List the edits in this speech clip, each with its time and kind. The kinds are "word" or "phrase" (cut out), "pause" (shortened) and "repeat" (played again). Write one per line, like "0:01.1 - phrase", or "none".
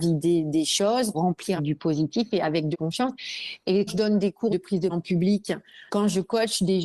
0:01.1 - word
0:01.6 - word
0:02.7 - word
0:03.9 - word
0:04.5 - word
0:04.9 - word
0:05.9 - word